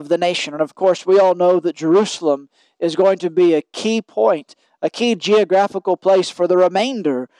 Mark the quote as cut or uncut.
uncut